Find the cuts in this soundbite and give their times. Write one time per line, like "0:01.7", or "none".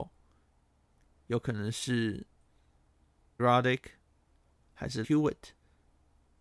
0:03.4
0:05.0